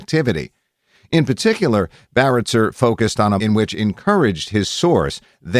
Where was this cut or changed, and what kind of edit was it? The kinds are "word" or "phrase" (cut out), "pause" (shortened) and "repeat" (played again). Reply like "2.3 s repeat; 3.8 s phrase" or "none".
3.4 s word; 3.7 s word